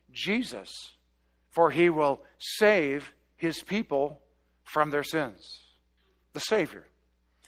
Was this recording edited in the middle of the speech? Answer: no; 0 cuts

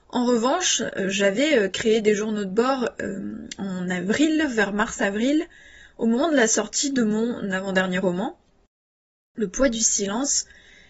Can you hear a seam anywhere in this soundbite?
no; 0 cuts

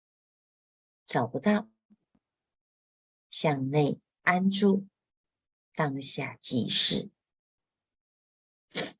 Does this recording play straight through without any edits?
yes; 0 cuts

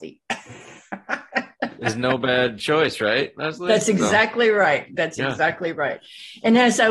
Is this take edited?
no; 0 cuts

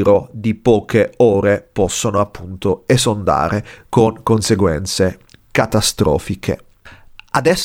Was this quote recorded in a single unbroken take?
yes; 0 cuts

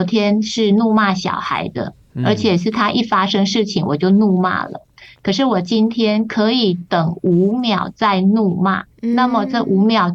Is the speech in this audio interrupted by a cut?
no; 0 cuts

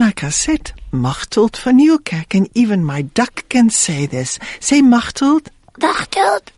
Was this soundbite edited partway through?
no; 0 cuts

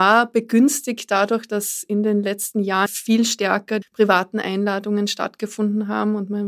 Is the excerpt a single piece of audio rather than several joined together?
no; 2 cuts; at 2.9 s, 3.8 s

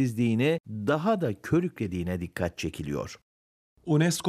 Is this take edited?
no; 0 cuts

